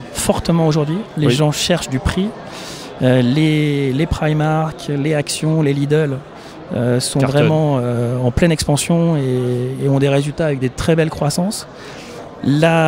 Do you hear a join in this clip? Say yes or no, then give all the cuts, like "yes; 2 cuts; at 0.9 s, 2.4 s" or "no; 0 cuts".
no; 0 cuts